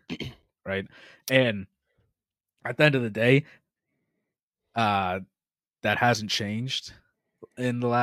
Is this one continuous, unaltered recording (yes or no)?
yes